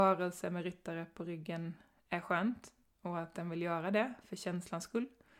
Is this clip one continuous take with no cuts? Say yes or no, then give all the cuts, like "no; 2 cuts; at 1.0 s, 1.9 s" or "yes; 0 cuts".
yes; 0 cuts